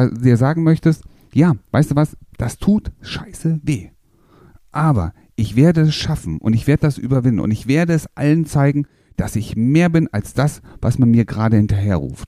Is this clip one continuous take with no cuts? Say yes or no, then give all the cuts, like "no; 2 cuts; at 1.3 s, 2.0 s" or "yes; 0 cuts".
yes; 0 cuts